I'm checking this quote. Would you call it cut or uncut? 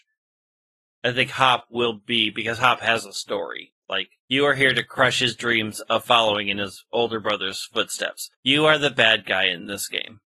cut